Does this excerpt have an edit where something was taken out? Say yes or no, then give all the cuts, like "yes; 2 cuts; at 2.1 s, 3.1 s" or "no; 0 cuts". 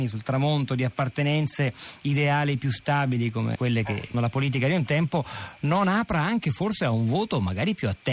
yes; 2 cuts; at 3.5 s, 4.1 s